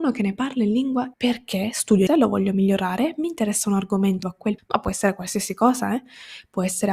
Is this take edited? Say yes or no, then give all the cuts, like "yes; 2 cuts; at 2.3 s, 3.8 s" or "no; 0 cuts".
yes; 4 cuts; at 1.1 s, 2.1 s, 4.2 s, 4.6 s